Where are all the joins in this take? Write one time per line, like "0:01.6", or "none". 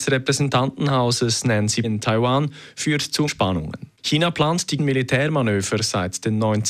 0:01.8
0:03.3
0:04.8